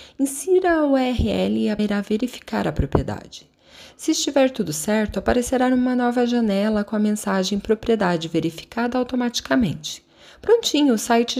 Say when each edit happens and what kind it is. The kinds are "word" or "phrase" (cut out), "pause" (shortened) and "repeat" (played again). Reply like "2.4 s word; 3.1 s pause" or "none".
1.8 s word